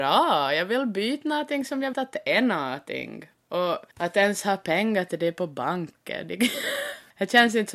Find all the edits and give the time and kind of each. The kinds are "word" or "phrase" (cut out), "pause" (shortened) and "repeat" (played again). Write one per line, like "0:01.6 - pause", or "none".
0:01.9 - word
0:03.9 - pause